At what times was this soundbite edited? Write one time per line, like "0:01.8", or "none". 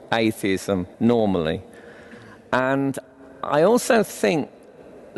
0:00.9